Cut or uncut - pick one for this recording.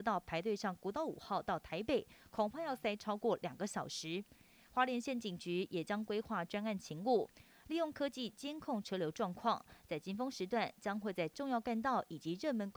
uncut